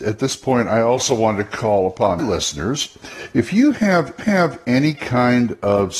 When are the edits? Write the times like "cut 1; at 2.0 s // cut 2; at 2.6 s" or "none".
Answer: cut 1; at 2.2 s // cut 2; at 4.2 s